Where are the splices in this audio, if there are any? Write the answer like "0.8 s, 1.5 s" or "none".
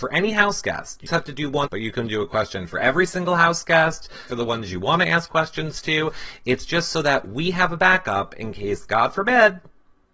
1.1 s, 1.7 s, 4.3 s